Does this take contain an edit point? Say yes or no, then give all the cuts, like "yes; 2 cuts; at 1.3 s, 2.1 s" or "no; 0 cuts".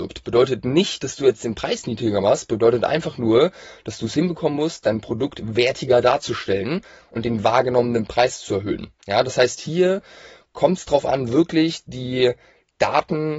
no; 0 cuts